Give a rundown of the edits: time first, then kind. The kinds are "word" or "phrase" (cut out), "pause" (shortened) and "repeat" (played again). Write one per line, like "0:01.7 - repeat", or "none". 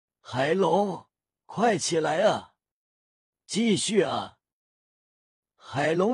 none